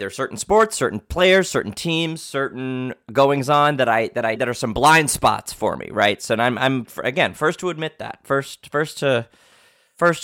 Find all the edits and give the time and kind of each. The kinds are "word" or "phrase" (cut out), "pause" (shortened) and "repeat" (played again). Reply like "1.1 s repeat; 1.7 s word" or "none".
4.4 s word